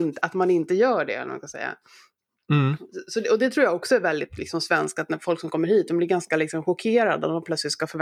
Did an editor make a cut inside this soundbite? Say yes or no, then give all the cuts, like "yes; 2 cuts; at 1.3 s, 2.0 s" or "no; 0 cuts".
no; 0 cuts